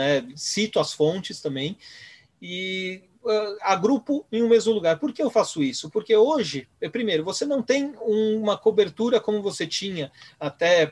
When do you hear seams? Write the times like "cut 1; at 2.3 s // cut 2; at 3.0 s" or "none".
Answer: none